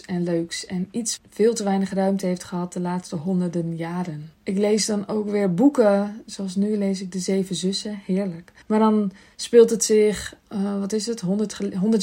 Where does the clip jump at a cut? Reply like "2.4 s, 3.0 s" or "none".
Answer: 1.2 s, 4.3 s, 8.6 s